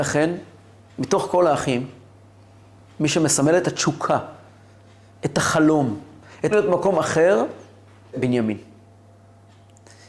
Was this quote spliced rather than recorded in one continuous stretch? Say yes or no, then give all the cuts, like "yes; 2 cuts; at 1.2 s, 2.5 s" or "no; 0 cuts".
yes; 2 cuts; at 6.5 s, 8.1 s